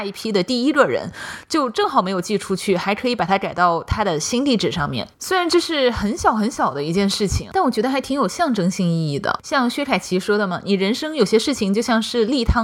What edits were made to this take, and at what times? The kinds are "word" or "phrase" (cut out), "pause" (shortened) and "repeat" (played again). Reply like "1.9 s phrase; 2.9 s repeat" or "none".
5.1 s pause

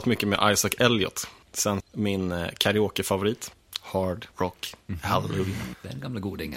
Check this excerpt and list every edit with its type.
1.8 s word; 4.3 s pause

